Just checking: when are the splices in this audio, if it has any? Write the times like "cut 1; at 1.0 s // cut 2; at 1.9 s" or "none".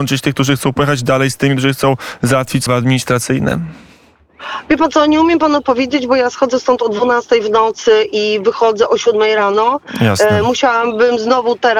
cut 1; at 2.7 s